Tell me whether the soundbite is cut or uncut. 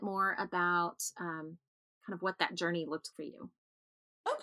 cut